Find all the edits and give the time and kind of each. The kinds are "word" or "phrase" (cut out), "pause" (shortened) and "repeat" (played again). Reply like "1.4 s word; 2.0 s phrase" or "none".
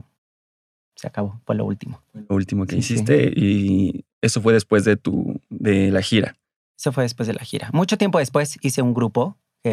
none